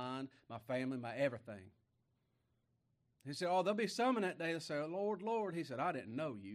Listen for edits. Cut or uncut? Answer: uncut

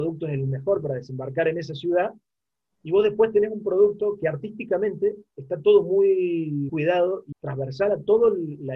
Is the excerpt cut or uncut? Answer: cut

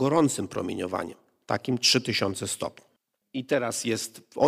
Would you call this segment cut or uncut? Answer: uncut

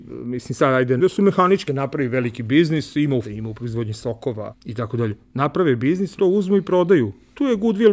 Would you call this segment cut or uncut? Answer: cut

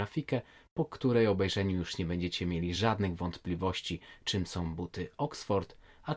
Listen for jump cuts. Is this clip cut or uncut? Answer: uncut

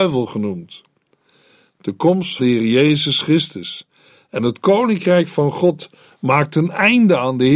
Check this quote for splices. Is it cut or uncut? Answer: cut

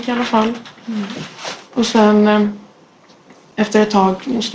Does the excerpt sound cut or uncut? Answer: uncut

